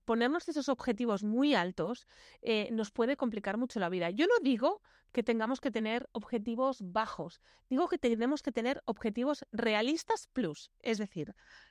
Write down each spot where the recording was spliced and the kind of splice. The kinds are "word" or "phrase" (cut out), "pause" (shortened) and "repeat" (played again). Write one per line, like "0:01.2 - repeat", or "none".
none